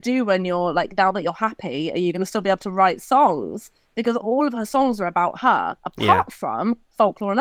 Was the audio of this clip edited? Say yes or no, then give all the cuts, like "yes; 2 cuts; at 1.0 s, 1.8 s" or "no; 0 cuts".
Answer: yes; 1 cut; at 5.8 s